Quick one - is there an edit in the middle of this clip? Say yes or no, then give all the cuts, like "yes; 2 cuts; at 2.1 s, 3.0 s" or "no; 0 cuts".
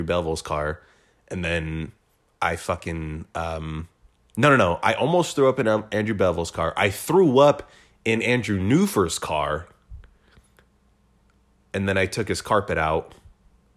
no; 0 cuts